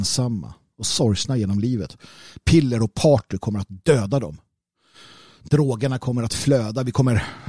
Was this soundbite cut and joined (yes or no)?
no